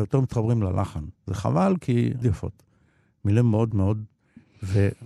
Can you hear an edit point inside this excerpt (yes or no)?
yes